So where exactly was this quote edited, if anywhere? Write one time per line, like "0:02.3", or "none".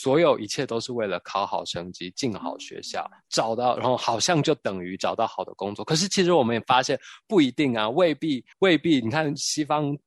0:08.5